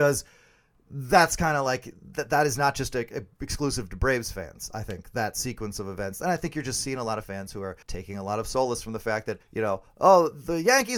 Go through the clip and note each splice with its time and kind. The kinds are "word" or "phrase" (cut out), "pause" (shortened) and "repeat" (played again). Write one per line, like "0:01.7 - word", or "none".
0:07.3 - word
0:07.8 - pause
0:09.4 - pause